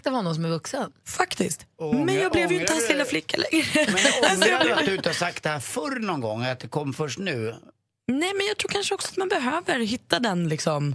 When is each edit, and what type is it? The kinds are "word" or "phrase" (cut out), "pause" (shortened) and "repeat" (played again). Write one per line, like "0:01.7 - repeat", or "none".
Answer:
none